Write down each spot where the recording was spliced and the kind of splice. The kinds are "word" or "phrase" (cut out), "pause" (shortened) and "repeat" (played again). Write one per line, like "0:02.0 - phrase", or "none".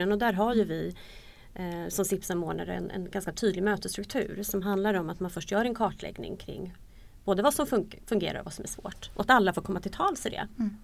none